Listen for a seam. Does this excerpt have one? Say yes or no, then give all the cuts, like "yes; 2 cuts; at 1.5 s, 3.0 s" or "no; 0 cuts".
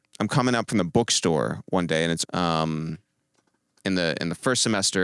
yes; 1 cut; at 2.2 s